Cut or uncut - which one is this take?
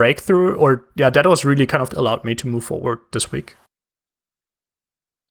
cut